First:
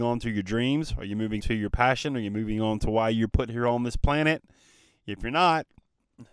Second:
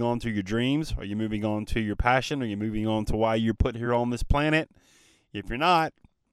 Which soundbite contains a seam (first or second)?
first